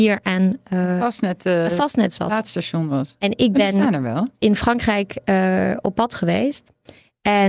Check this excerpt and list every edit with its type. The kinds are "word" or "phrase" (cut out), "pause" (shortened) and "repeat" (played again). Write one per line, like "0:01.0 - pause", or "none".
none